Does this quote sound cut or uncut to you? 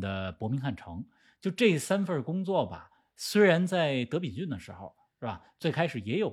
uncut